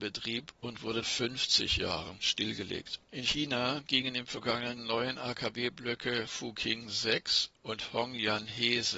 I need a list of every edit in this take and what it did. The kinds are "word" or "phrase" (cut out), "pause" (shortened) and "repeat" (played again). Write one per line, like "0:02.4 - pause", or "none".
0:01.0 - phrase
0:03.0 - pause
0:04.8 - phrase